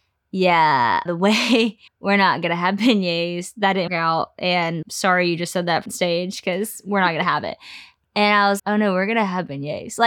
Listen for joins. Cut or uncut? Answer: cut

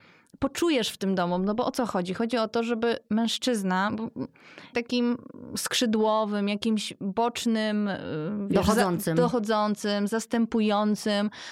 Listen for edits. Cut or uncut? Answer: cut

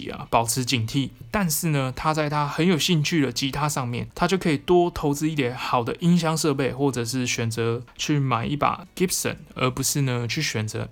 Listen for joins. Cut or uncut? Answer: uncut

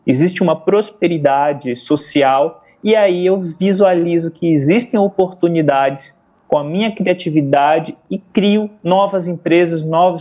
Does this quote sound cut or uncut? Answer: uncut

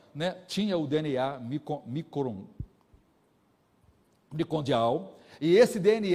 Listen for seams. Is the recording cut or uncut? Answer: uncut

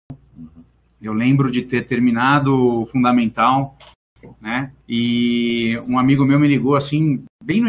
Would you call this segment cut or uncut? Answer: cut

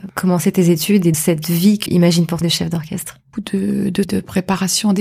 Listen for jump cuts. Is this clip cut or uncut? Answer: cut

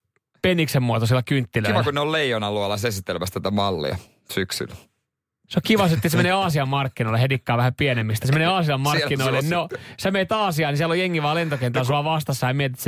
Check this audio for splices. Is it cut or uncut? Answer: uncut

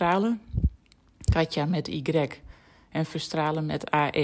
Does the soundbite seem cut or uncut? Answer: uncut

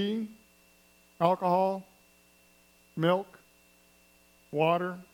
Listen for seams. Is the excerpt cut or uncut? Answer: uncut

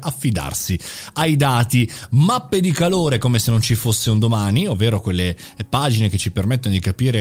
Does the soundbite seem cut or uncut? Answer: uncut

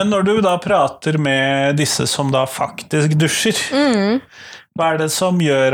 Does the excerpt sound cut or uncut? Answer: uncut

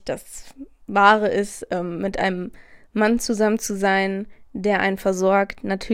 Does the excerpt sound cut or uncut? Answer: uncut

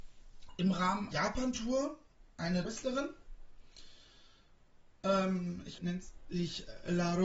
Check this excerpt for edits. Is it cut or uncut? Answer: cut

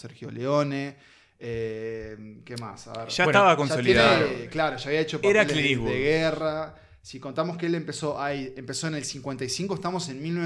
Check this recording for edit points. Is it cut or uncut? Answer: uncut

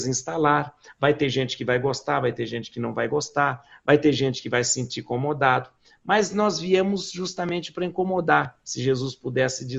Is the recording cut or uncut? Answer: uncut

